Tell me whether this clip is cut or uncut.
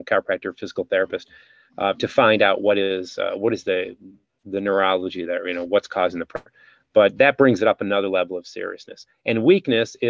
uncut